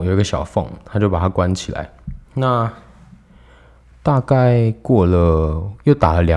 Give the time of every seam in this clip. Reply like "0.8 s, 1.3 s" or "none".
2.3 s